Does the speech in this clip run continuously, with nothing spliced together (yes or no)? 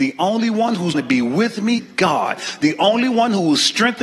no